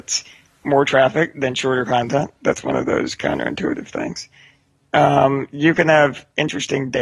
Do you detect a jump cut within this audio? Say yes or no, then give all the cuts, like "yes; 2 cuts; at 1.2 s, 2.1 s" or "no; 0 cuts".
no; 0 cuts